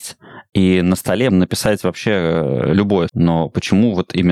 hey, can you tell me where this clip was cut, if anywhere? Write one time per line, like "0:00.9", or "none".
0:01.3
0:03.1